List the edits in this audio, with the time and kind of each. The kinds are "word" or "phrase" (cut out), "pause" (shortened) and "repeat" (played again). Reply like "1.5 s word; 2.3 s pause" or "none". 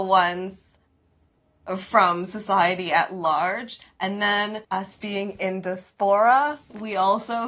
4.6 s pause